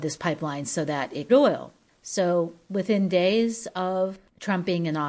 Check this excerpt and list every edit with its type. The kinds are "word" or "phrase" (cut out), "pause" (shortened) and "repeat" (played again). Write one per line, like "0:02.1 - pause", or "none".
0:01.3 - phrase